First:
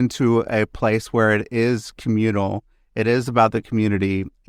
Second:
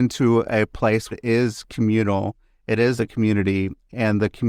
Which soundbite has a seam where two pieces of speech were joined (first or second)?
second